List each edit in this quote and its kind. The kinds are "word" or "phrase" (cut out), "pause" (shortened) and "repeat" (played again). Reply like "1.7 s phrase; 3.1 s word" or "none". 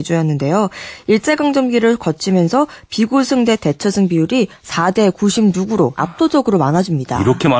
6.0 s word